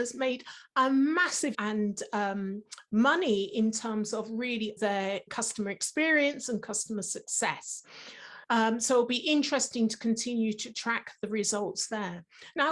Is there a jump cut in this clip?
yes; 4 cuts; at 1.5 s, 4.8 s, 5.3 s, 8.4 s

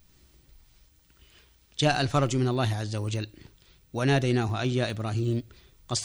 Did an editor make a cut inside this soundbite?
no; 0 cuts

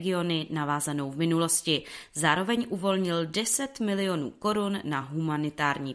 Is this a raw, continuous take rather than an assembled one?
yes; 0 cuts

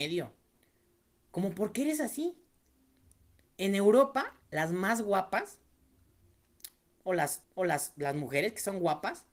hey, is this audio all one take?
no; 2 cuts; at 4.4 s, 7.4 s

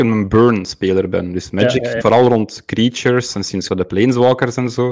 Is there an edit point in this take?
yes; 2 cuts; at 2.0 s, 3.7 s

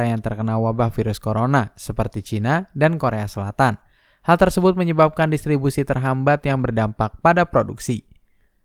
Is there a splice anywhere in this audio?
no; 0 cuts

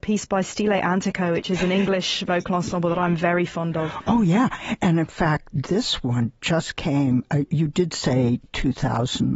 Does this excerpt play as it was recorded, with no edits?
yes; 0 cuts

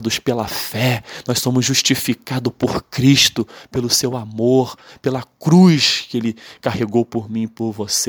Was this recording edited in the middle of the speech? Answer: no; 0 cuts

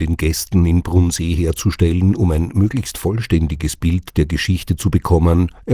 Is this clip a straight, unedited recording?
yes; 0 cuts

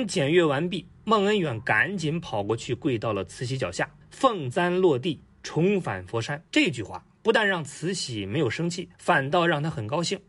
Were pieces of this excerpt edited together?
yes; 3 cuts; at 4.0 s, 6.5 s, 8.9 s

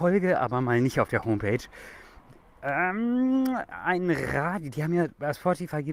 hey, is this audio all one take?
yes; 0 cuts

